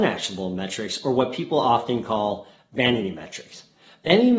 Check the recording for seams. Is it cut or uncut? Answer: uncut